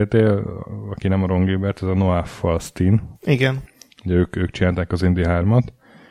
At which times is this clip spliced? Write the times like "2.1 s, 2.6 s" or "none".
3.1 s